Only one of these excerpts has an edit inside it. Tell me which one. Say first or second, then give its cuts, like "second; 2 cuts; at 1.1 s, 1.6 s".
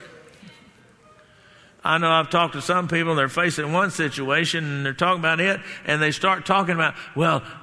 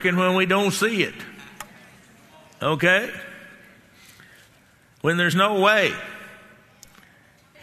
second; 1 cut; at 5.3 s